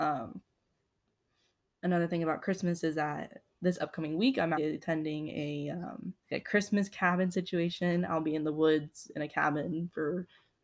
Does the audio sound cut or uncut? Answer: cut